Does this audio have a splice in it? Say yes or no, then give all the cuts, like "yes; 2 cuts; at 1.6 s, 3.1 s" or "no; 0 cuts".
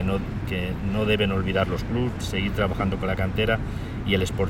no; 0 cuts